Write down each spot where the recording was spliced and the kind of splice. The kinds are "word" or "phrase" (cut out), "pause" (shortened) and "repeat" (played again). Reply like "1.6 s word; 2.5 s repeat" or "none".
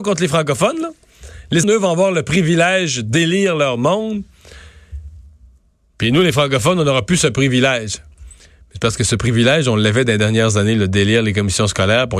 1.6 s word

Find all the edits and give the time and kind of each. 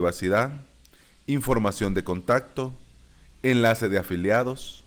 none

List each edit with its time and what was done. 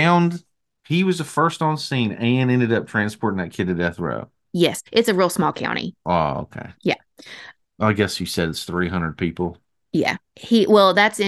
4.9 s pause; 6.0 s pause; 6.7 s pause; 10.3 s pause

